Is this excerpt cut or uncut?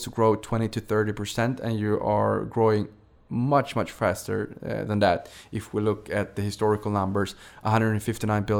uncut